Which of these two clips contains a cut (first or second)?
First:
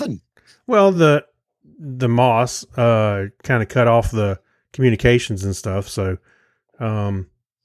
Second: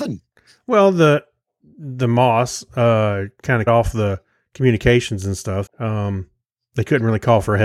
second